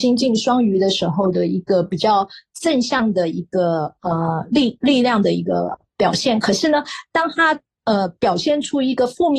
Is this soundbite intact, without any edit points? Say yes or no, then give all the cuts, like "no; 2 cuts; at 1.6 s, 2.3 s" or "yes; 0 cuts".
yes; 0 cuts